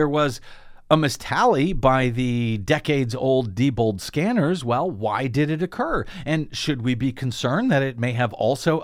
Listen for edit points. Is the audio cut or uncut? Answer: uncut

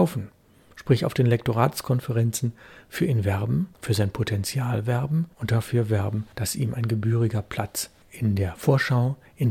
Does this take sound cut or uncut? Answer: cut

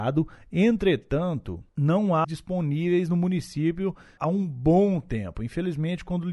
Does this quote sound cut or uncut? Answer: cut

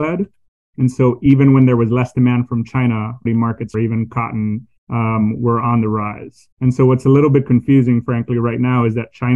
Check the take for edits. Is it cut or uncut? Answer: cut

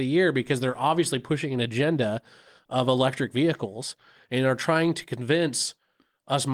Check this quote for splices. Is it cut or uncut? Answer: uncut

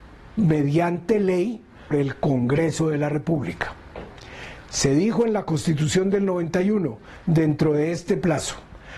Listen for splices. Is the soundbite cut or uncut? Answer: cut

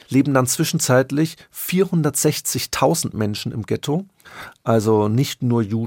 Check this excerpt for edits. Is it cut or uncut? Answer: uncut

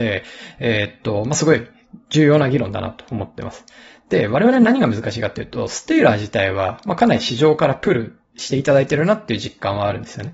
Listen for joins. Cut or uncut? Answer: uncut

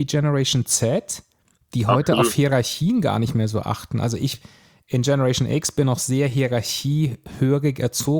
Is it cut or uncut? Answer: uncut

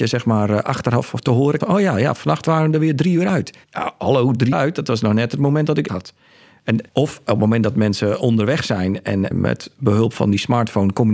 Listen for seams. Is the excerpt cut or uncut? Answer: cut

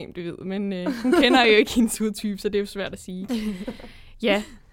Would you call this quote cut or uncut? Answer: uncut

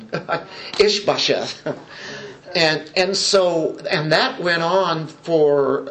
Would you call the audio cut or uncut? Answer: uncut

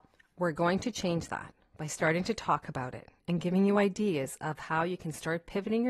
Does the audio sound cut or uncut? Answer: uncut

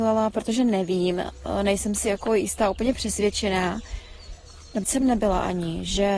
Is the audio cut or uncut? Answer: cut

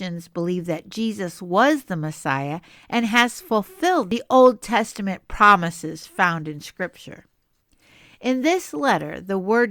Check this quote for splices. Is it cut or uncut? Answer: uncut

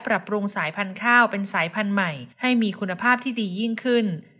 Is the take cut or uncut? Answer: cut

